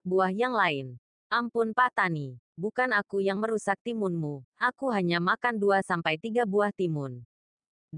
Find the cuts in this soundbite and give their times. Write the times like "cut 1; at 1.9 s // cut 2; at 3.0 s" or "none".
none